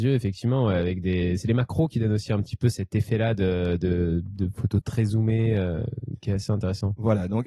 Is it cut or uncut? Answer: uncut